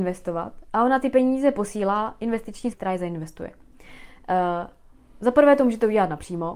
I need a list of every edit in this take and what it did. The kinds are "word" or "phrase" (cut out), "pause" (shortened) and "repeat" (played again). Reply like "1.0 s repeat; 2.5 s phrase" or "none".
2.7 s word